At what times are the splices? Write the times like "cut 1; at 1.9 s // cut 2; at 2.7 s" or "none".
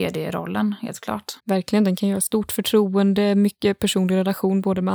cut 1; at 1.4 s